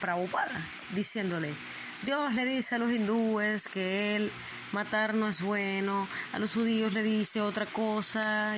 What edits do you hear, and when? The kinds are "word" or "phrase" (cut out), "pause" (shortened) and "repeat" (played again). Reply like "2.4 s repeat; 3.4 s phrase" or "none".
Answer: none